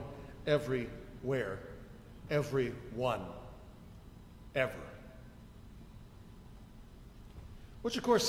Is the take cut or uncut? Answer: cut